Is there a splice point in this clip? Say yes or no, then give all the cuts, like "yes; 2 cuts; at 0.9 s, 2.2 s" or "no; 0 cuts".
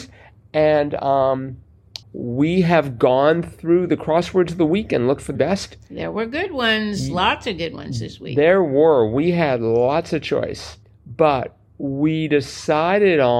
yes; 3 cuts; at 2.0 s, 5.3 s, 10.8 s